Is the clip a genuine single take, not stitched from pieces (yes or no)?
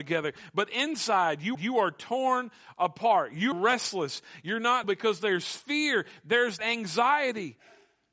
no